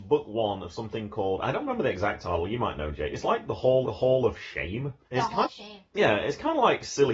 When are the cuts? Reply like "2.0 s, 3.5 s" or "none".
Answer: 3.8 s, 5.0 s, 5.4 s

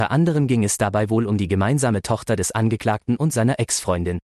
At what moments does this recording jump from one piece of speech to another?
none

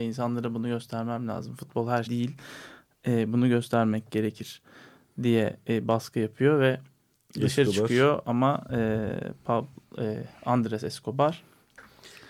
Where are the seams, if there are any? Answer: 2.1 s

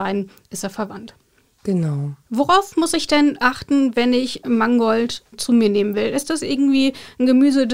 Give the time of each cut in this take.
2.2 s

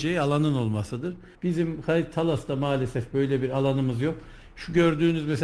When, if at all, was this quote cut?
1.3 s

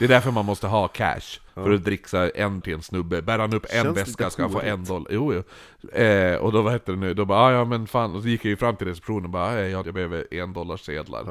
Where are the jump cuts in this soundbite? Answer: 1.5 s, 2.6 s, 9.8 s

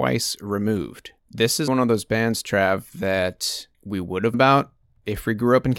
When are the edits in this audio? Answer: 1.2 s, 1.7 s, 3.7 s, 4.3 s, 4.9 s

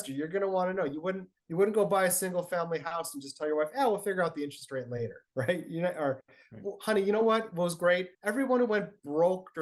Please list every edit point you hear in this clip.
1.4 s, 5.3 s, 8.1 s

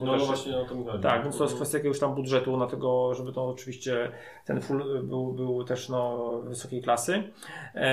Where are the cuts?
none

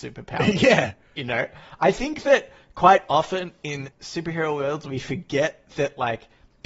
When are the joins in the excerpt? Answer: 3.9 s

